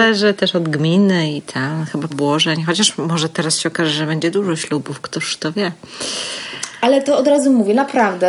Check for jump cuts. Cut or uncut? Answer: cut